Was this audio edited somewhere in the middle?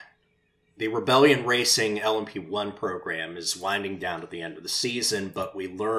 no; 0 cuts

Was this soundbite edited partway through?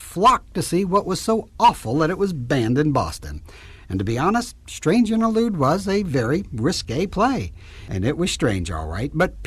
no; 0 cuts

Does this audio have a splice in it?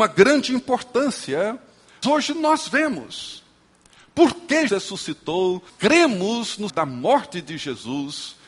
yes; 4 cuts; at 2.0 s, 4.7 s, 5.7 s, 6.7 s

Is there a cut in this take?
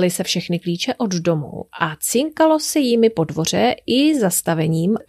no; 0 cuts

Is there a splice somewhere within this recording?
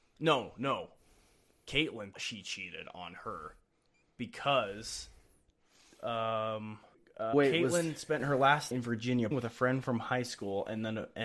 yes; 4 cuts; at 2.1 s, 7.3 s, 8.7 s, 9.3 s

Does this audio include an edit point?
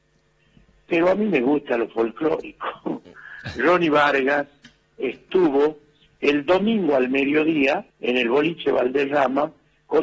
yes; 1 cut; at 7.9 s

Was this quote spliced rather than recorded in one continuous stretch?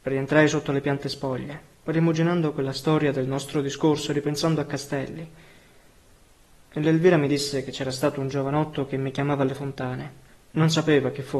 no; 0 cuts

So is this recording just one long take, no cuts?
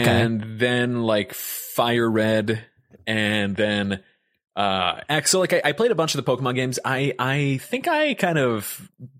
yes; 0 cuts

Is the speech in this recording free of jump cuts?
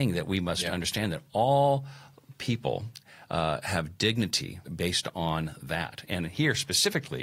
no; 1 cut; at 4.7 s

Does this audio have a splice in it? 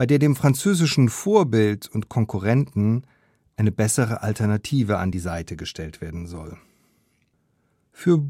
no; 0 cuts

